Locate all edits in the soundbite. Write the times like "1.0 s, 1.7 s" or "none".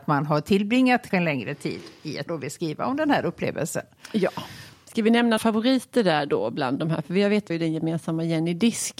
1.1 s, 2.3 s, 5.4 s, 7.5 s